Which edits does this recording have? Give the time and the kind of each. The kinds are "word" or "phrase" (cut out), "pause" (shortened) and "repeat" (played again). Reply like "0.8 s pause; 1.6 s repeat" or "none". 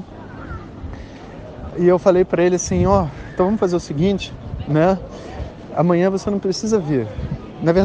none